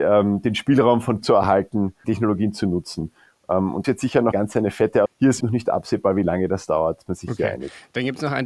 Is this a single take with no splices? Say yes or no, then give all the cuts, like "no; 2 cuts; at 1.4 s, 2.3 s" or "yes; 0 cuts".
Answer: no; 7 cuts; at 1.2 s, 2.0 s, 3.8 s, 4.3 s, 5.1 s, 5.4 s, 7.1 s